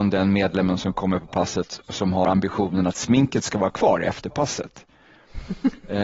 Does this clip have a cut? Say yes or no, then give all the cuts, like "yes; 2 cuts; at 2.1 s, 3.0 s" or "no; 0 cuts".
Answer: no; 0 cuts